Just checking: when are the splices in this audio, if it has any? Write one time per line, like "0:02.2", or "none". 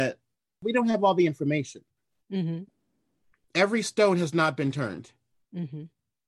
none